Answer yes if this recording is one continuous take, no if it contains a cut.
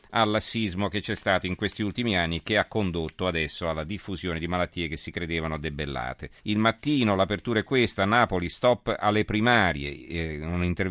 no